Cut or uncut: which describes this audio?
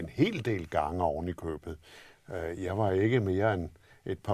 uncut